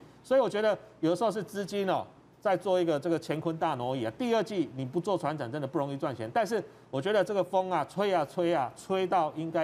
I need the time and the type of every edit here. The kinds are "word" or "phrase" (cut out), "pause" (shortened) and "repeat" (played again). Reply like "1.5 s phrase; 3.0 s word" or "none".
none